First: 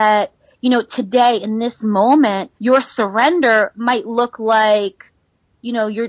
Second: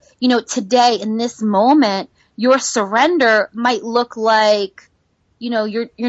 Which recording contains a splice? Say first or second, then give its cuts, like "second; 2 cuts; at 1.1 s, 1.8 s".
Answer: first; 1 cut; at 2.6 s